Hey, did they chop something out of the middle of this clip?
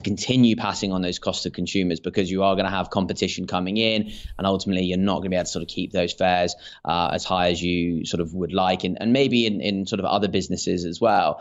no; 0 cuts

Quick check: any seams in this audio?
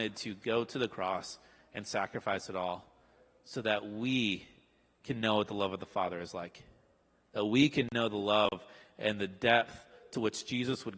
no; 0 cuts

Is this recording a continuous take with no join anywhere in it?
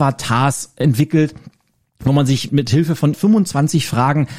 no; 2 cuts; at 2.5 s, 3.1 s

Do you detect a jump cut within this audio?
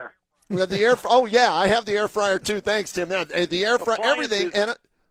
no; 0 cuts

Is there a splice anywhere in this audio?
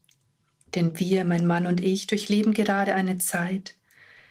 no; 0 cuts

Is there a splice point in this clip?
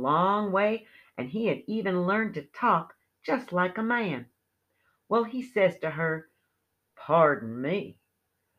no; 0 cuts

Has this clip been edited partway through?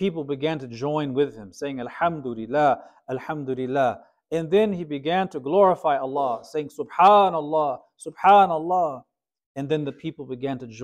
no; 0 cuts

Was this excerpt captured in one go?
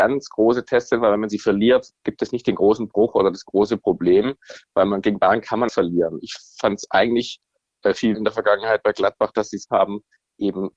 no; 3 cuts; at 5.7 s, 8.1 s, 9.7 s

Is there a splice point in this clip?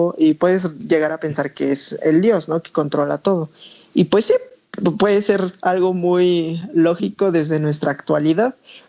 no; 0 cuts

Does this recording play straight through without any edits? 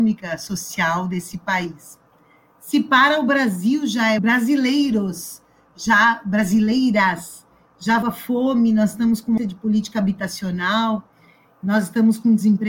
no; 3 cuts; at 4.2 s, 8.0 s, 9.4 s

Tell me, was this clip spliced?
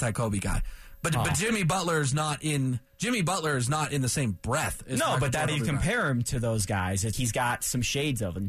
yes; 3 cuts; at 2.9 s, 5.5 s, 7.1 s

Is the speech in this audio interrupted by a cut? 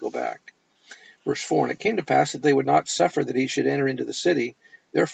no; 0 cuts

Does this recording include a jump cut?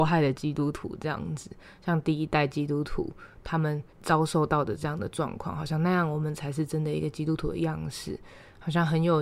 yes; 1 cut; at 3.9 s

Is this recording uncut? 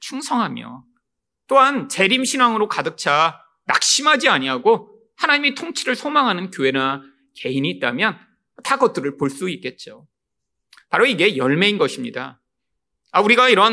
yes; 0 cuts

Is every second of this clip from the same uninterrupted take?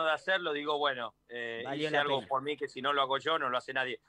yes; 0 cuts

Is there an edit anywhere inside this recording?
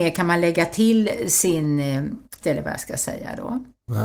yes; 1 cut; at 2.4 s

